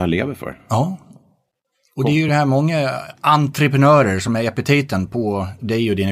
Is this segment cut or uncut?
uncut